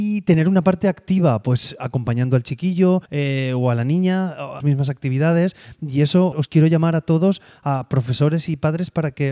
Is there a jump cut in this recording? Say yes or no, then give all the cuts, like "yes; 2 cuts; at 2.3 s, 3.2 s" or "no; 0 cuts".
yes; 3 cuts; at 3.1 s, 4.6 s, 6.3 s